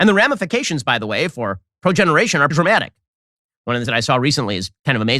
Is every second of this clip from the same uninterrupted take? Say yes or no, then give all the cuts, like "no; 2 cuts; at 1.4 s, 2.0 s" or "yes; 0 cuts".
no; 2 cuts; at 2.5 s, 3.8 s